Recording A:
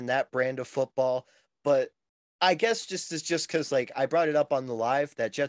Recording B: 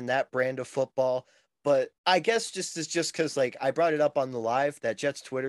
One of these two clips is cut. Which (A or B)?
B